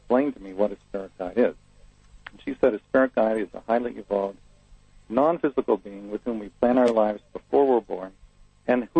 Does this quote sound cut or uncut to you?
uncut